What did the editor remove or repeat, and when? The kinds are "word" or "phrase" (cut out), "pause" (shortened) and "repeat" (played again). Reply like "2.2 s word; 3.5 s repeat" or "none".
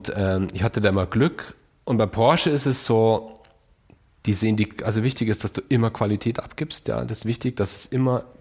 none